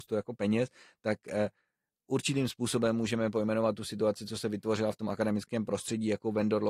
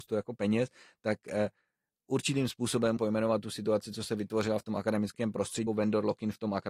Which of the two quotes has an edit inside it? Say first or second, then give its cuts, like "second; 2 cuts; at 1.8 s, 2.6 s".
second; 2 cuts; at 3.0 s, 5.7 s